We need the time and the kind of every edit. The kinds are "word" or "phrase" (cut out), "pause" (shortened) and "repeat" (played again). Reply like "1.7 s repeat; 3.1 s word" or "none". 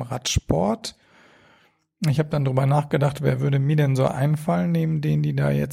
none